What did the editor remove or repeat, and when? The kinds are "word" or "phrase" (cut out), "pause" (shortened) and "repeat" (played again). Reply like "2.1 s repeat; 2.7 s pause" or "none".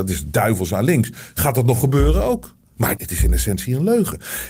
2.6 s pause; 3.0 s word